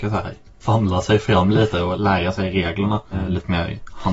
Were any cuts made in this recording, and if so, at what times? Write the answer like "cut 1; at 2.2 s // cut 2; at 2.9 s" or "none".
none